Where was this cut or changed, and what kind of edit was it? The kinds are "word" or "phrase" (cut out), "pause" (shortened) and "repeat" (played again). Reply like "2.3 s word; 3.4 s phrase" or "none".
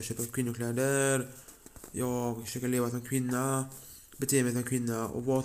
none

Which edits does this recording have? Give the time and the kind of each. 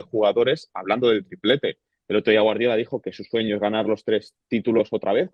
none

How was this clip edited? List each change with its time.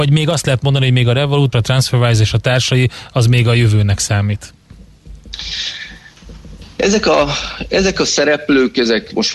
1.5 s word

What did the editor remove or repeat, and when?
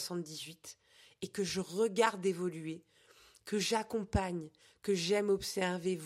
none

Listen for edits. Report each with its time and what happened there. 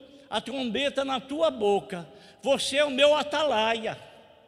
none

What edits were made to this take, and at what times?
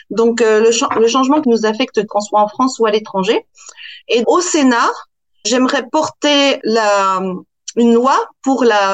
1.4 s word; 2.1 s word; 4.2 s word; 5.4 s word; 6.6 s word

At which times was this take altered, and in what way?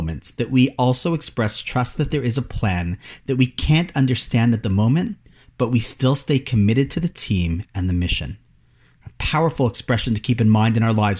none

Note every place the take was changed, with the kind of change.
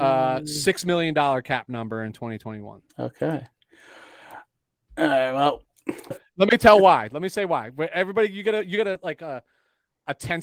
2.9 s pause; 6.1 s word

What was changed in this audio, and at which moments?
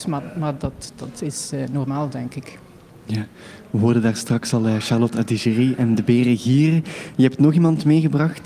none

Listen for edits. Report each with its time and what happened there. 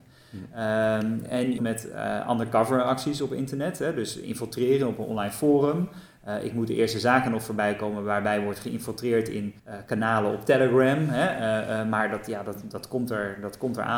1.6 s phrase; 9.6 s pause

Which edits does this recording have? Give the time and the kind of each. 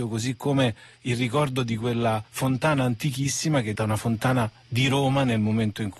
2.3 s pause; 3.7 s word

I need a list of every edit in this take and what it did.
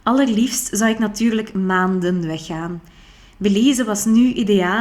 none

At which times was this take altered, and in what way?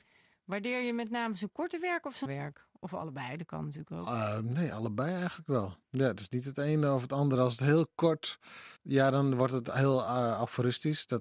2.3 s word; 5.8 s pause; 8.8 s pause

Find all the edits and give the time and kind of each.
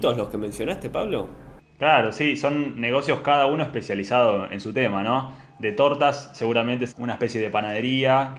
6.9 s word

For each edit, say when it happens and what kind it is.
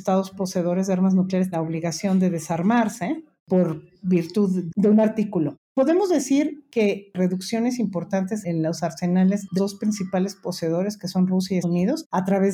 1.5 s word; 5.6 s pause; 7.1 s phrase; 9.6 s word; 11.6 s word

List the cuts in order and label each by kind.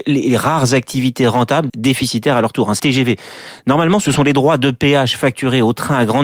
1.7 s word; 2.8 s phrase; 4.0 s word

